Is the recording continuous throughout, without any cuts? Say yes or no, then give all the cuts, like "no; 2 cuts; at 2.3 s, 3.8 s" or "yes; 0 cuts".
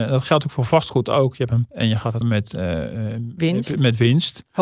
no; 2 cuts; at 1.7 s, 2.2 s